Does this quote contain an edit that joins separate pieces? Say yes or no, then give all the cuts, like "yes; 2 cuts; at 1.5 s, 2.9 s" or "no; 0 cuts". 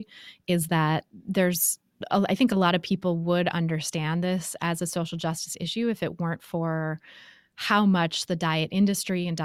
no; 0 cuts